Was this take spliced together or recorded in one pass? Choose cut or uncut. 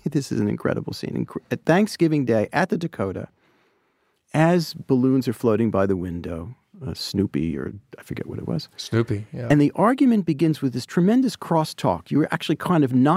uncut